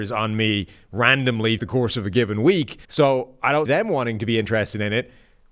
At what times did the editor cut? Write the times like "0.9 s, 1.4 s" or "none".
1.6 s, 2.8 s, 3.7 s